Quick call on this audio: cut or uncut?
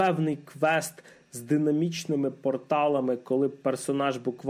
uncut